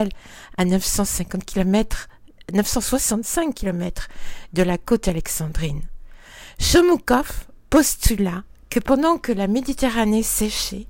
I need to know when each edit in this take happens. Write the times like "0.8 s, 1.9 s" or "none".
none